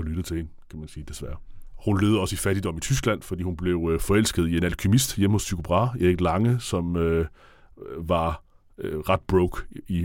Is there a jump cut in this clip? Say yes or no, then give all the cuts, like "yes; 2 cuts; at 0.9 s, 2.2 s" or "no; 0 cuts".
no; 0 cuts